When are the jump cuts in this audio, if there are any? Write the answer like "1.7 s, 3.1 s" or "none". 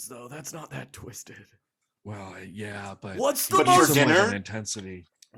none